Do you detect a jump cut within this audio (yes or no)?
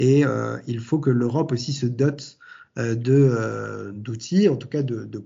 no